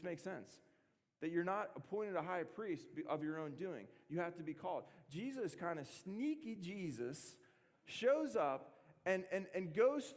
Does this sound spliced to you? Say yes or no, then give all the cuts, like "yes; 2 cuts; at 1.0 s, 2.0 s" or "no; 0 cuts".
no; 0 cuts